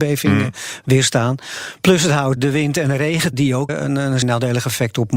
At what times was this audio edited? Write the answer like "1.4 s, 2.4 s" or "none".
2.4 s, 3.3 s, 3.7 s, 4.2 s